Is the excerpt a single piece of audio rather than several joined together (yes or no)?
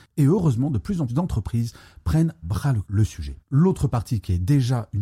no